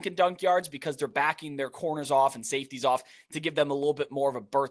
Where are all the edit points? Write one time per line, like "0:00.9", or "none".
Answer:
none